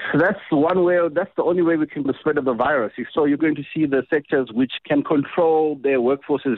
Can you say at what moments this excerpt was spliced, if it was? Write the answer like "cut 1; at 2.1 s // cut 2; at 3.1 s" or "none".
cut 1; at 2.1 s // cut 2; at 3.4 s // cut 3; at 4.8 s